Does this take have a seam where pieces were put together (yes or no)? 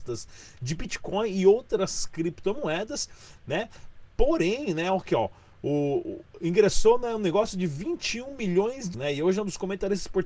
yes